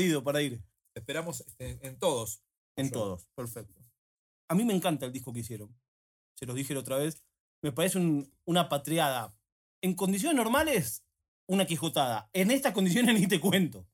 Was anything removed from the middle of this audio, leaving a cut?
no; 0 cuts

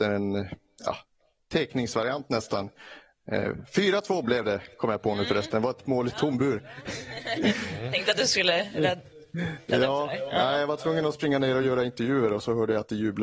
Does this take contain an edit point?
no; 0 cuts

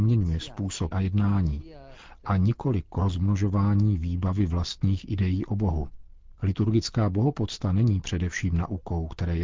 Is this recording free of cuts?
no; 1 cut; at 0.9 s

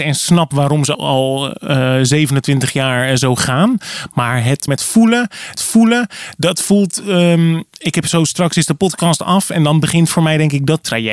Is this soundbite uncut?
no; 3 cuts; at 0.9 s, 4.7 s, 5.6 s

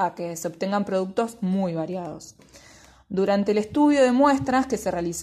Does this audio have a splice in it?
no; 0 cuts

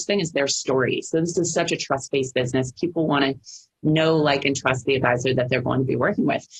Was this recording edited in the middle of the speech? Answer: no; 0 cuts

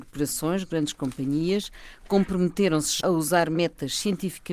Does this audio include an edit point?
yes; 1 cut; at 3.0 s

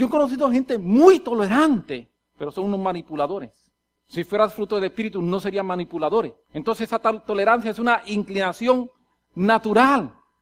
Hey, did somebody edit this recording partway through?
yes; 1 cut; at 6.4 s

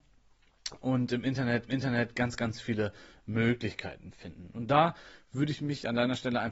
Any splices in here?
yes; 1 cut; at 1.7 s

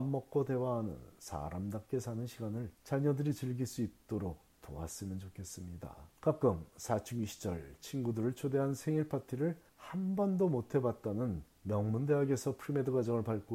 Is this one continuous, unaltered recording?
no; 4 cuts; at 2.7 s, 6.2 s, 9.7 s, 11.5 s

